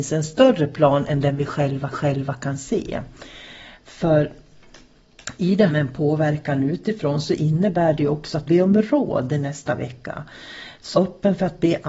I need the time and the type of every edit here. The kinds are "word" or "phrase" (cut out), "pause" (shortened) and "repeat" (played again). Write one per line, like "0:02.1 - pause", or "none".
0:01.9 - repeat
0:05.7 - word
0:08.5 - phrase
0:10.9 - word